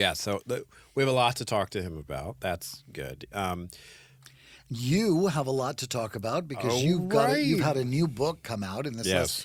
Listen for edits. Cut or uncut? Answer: uncut